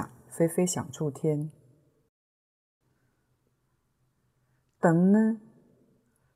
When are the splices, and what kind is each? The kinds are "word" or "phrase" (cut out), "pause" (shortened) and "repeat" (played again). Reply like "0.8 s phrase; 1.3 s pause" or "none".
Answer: none